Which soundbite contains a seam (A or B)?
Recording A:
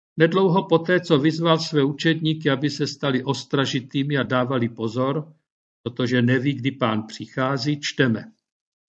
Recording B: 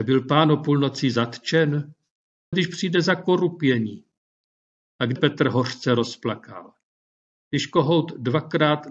B